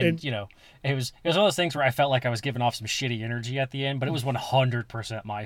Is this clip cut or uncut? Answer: uncut